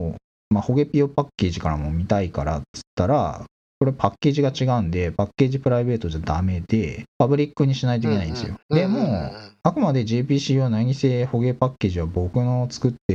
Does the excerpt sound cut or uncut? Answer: cut